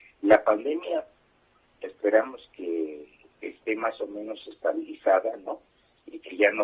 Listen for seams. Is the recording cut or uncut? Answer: uncut